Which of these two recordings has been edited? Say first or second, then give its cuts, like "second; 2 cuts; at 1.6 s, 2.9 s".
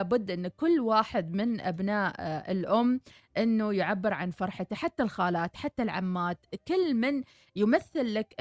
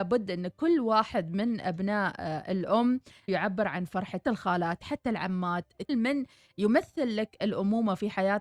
second; 3 cuts; at 3.3 s, 4.2 s, 5.9 s